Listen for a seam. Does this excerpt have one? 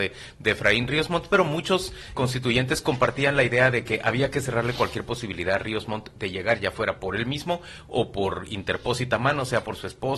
yes; 1 cut; at 2.1 s

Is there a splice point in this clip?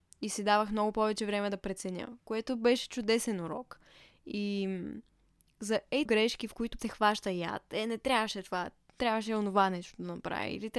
yes; 2 cuts; at 6.1 s, 6.8 s

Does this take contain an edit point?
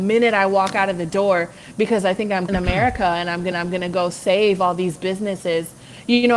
yes; 2 cuts; at 2.5 s, 3.5 s

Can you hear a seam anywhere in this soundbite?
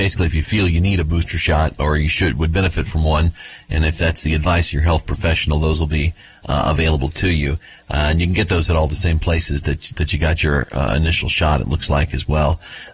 no; 0 cuts

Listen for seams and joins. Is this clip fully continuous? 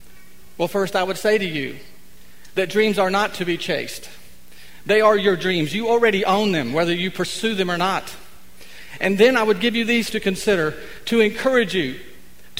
no; 1 cut; at 10.1 s

